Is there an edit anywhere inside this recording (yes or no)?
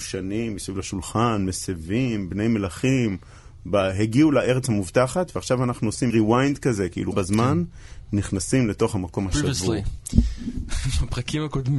yes